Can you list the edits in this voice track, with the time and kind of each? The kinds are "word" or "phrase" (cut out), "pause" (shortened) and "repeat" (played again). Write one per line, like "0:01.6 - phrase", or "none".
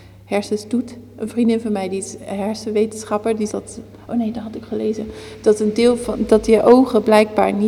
0:03.5 - word
0:04.6 - word